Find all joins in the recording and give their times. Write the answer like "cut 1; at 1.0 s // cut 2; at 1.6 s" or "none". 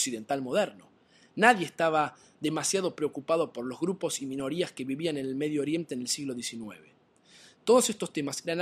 none